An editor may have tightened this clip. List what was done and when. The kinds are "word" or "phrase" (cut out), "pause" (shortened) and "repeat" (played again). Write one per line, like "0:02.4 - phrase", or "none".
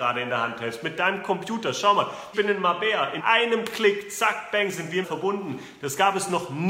0:02.3 - word
0:03.2 - word
0:05.0 - word